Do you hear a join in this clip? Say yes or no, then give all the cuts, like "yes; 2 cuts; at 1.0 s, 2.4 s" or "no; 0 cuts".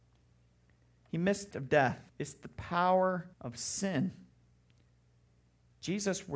yes; 3 cuts; at 1.5 s, 2.1 s, 3.3 s